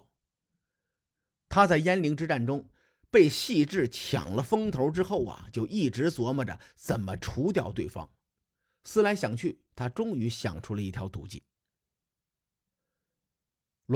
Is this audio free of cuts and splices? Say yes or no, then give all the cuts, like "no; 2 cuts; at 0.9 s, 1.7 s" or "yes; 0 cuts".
yes; 0 cuts